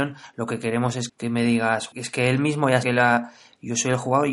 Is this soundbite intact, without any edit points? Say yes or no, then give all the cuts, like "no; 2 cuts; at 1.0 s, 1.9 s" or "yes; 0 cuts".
no; 3 cuts; at 1.1 s, 1.9 s, 2.8 s